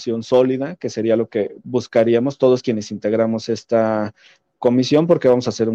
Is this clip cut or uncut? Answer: uncut